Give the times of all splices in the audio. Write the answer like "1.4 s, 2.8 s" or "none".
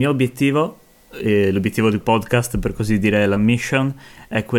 2.0 s, 3.4 s